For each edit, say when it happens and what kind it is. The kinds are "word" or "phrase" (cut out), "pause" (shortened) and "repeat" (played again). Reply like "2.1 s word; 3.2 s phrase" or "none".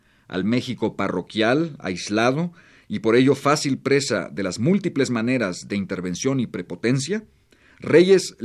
none